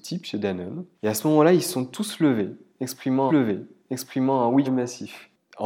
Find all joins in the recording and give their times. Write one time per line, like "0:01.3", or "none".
0:00.9
0:03.3
0:04.6